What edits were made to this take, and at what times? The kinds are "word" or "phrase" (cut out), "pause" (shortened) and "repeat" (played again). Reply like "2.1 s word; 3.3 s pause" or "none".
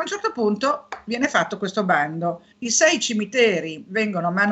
2.5 s pause